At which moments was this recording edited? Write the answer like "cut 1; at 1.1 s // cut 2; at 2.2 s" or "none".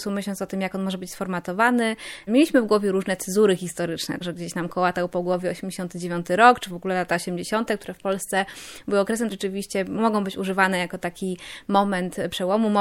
cut 1; at 9.3 s